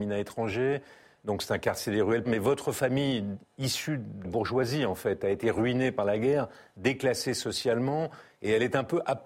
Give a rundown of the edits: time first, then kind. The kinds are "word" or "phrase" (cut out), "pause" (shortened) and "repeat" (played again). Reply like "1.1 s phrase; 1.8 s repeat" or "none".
2.2 s word; 4.2 s word